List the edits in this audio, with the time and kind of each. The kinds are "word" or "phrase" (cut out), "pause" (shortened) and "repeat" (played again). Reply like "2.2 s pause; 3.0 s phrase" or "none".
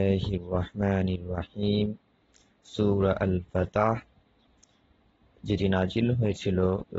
none